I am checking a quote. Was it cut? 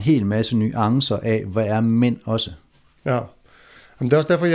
no; 0 cuts

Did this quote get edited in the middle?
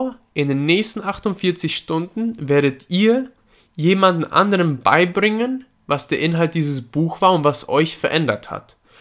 no; 0 cuts

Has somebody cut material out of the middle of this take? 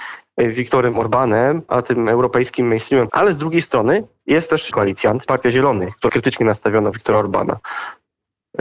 yes; 6 cuts; at 1.7 s, 3.1 s, 4.7 s, 5.3 s, 6.1 s, 6.9 s

